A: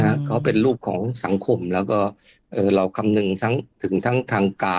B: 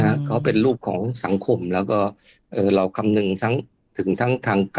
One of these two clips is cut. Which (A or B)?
A